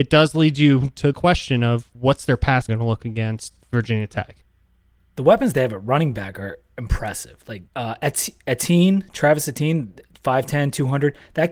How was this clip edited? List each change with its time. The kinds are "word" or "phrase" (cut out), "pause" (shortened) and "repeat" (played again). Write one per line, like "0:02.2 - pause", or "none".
0:01.1 - word
0:01.9 - pause
0:02.7 - word
0:04.7 - pause
0:07.7 - pause